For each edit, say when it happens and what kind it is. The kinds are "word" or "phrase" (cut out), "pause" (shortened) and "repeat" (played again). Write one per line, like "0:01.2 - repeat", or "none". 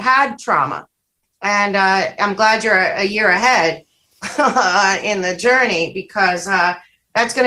none